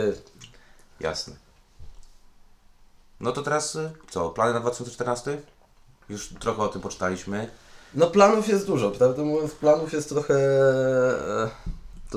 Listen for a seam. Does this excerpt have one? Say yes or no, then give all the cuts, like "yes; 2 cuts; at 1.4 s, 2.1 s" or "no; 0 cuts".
no; 0 cuts